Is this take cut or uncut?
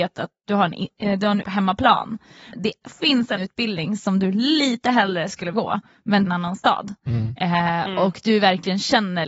cut